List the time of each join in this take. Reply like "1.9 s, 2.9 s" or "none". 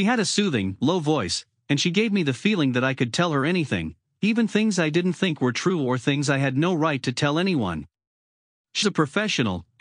8.8 s